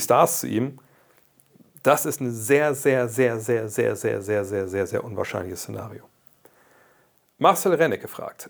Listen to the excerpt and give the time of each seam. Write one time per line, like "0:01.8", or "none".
none